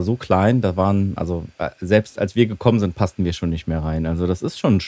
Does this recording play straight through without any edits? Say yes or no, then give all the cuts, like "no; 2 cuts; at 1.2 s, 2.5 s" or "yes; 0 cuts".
yes; 0 cuts